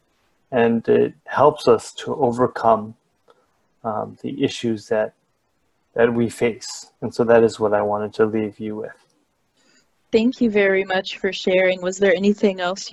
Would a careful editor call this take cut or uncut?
cut